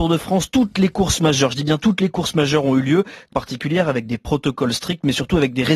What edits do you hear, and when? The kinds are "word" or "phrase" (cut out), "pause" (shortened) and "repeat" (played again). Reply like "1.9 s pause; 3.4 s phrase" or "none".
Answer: 3.3 s phrase

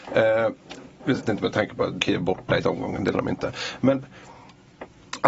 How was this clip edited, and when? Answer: 1.3 s word; 2.0 s word; 2.6 s word; 3.1 s word

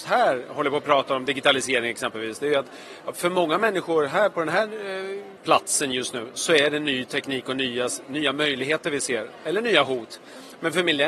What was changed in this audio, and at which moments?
5.4 s word

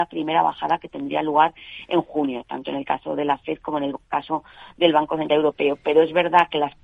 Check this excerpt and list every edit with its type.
4.0 s pause

